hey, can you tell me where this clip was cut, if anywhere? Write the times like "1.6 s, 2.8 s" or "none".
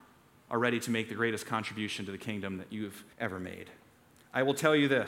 3.1 s